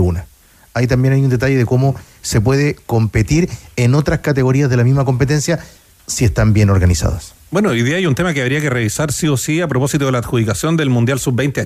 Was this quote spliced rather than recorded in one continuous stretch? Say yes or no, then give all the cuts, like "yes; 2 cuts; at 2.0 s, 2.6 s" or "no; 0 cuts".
no; 0 cuts